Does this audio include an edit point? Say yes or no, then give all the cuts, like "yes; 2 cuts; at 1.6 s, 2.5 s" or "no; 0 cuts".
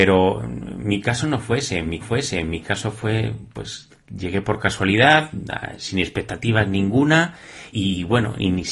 yes; 2 cuts; at 2.0 s, 7.7 s